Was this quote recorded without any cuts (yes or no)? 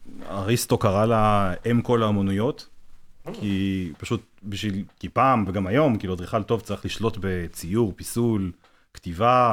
yes